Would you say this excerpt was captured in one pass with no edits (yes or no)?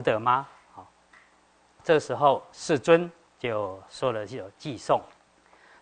no